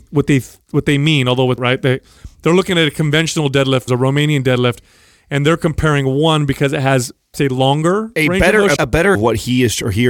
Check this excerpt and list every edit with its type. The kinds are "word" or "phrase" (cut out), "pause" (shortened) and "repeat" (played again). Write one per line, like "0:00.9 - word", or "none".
0:01.6 - word
0:03.9 - word
0:07.3 - word
0:08.8 - word
0:09.1 - word